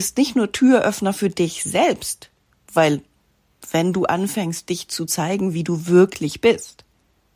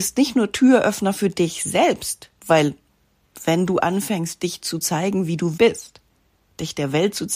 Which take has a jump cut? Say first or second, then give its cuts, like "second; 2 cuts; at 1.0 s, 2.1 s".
second; 2 cuts; at 2.4 s, 5.6 s